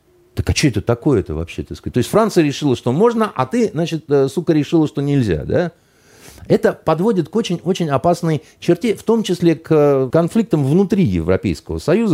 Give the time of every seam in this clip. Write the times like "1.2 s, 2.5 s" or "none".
10.1 s